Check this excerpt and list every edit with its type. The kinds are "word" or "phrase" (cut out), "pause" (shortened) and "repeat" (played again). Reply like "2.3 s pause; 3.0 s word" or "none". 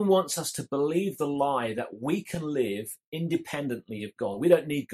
none